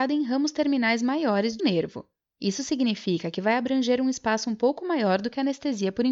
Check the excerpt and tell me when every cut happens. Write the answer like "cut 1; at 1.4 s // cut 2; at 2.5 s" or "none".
cut 1; at 1.6 s